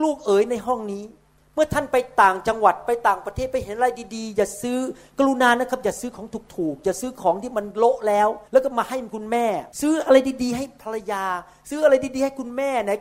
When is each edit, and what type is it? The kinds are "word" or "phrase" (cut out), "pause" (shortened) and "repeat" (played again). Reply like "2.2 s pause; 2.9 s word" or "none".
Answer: 8.5 s pause; 9.7 s pause